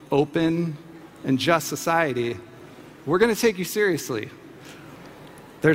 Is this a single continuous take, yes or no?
yes